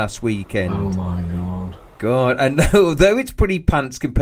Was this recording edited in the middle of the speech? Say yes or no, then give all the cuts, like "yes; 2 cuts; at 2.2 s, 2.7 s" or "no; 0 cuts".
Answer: no; 0 cuts